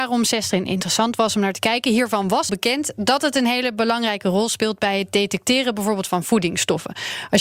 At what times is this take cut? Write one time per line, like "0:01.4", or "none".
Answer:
0:02.5